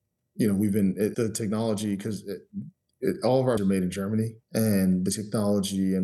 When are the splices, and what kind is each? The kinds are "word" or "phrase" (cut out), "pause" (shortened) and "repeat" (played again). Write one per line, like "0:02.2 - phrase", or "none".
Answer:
0:01.1 - word
0:03.6 - word
0:04.4 - pause